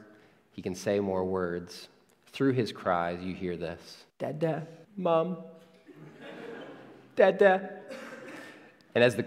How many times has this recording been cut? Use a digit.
2